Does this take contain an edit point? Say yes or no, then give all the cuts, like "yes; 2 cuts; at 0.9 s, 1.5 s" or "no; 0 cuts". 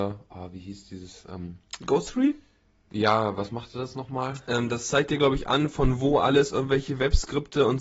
no; 0 cuts